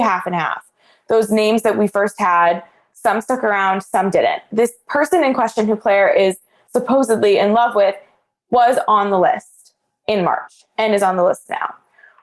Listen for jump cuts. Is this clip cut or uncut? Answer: uncut